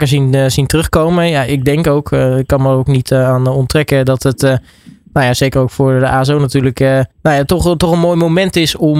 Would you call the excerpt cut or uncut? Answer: cut